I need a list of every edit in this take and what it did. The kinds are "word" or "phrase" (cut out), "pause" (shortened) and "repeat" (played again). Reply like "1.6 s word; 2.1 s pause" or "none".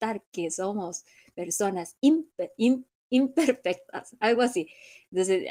none